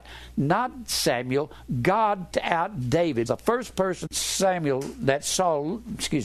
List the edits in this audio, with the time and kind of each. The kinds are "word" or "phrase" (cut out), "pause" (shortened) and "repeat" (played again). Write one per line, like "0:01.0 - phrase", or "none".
0:02.3 - word
0:03.3 - word
0:04.1 - word